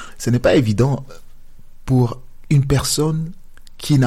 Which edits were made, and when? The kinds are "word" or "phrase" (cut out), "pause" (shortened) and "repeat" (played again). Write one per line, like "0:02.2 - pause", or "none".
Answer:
none